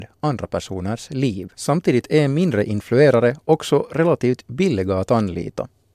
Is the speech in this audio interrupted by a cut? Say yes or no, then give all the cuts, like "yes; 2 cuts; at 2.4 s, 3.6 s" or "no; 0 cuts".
yes; 1 cut; at 1.5 s